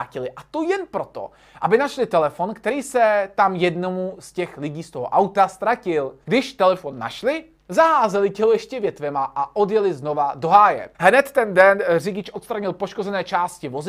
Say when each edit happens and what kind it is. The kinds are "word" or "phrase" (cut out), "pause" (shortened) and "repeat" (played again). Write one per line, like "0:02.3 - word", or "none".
0:06.2 - pause
0:10.9 - pause